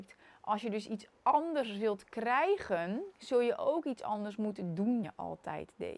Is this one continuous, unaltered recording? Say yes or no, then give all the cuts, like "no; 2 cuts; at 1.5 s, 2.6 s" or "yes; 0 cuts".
no; 2 cuts; at 3.1 s, 5.0 s